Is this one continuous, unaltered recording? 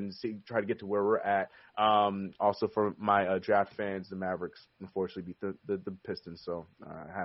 yes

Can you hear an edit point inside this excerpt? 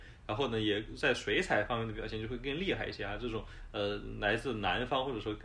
no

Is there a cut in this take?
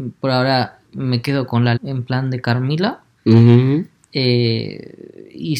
yes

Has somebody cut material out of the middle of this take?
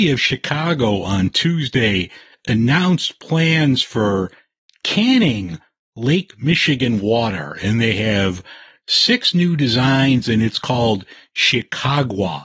no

